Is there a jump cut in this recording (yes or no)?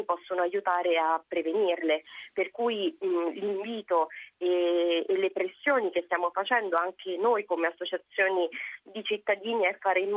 no